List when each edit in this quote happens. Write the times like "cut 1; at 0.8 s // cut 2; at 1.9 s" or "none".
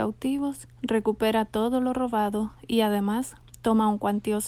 none